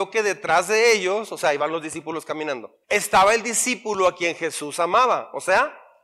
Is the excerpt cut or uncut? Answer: cut